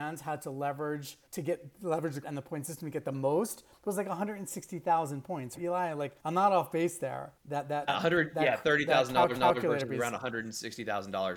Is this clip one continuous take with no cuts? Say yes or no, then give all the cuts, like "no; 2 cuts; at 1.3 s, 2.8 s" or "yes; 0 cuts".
no; 7 cuts; at 1.3 s, 2.2 s, 5.6 s, 6.2 s, 7.4 s, 7.9 s, 9.3 s